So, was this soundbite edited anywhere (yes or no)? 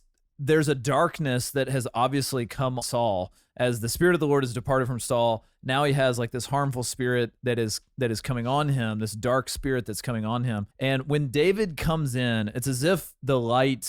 yes